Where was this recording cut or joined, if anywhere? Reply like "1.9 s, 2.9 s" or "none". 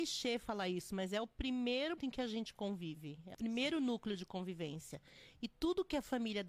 2.0 s, 3.3 s